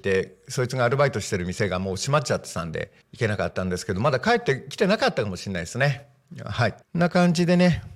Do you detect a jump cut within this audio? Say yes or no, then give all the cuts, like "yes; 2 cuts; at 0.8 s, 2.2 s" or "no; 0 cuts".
yes; 2 cuts; at 3.0 s, 6.8 s